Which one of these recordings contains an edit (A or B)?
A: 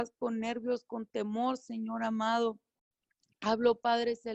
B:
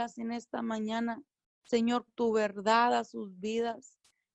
B